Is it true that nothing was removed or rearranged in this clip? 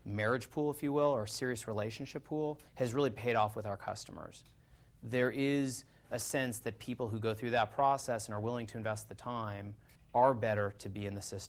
no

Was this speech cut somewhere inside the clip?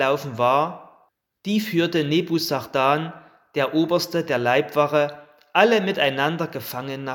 no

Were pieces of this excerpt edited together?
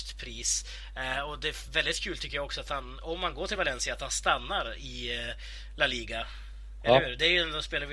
no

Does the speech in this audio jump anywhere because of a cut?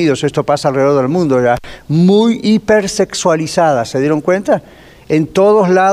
no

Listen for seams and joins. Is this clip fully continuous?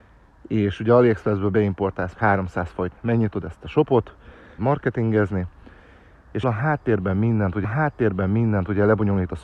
no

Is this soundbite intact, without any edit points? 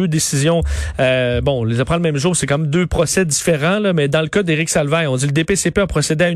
yes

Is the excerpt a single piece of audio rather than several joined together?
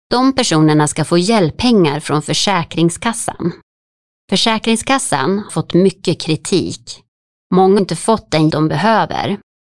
no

